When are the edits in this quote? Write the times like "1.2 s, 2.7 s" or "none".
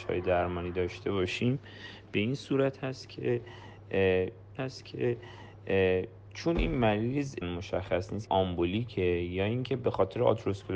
4.6 s, 7.4 s, 8.3 s